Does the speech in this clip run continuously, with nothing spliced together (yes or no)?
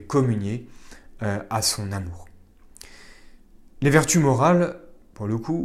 yes